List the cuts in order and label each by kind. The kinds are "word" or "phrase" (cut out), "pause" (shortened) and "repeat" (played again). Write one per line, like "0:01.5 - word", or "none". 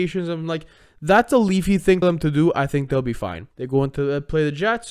0:02.0 - word
0:03.5 - pause

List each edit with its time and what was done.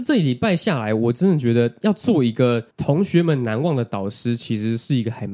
0:02.7 - pause

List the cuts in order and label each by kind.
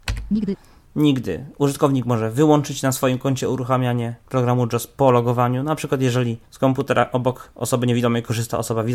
0:06.5 - pause

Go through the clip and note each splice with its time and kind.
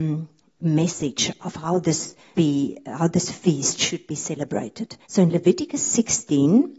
0:02.3 - word
0:05.0 - pause

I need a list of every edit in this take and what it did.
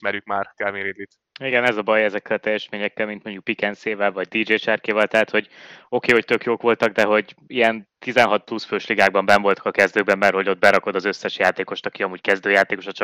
0:01.2 - pause

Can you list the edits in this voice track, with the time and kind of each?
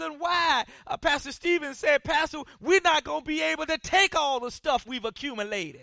0:04.8 - word

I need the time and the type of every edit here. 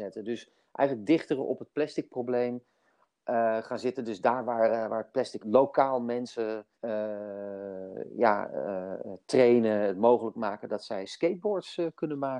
0:05.4 - phrase
0:06.7 - pause

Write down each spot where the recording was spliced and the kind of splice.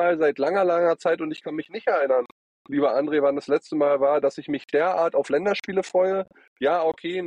none

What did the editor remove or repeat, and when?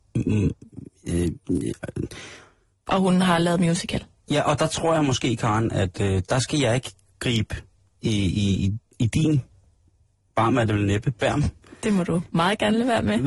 none

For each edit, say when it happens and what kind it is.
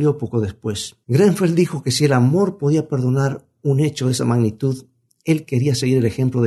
0:01.0 - pause

